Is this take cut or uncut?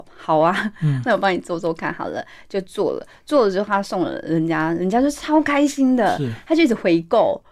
uncut